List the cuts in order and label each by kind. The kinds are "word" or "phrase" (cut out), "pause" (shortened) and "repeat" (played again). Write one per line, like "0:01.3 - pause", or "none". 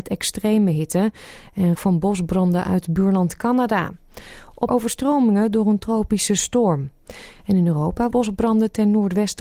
0:01.7 - word
0:04.7 - phrase
0:08.1 - word